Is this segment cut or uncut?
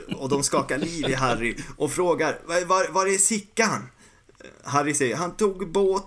uncut